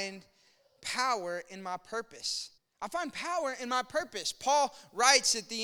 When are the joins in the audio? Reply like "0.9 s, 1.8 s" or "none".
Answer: 2.6 s